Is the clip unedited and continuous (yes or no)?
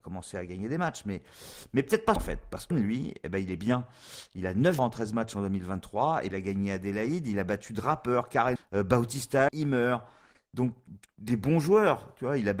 no